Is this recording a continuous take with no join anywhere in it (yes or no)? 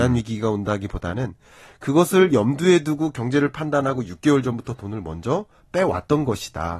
yes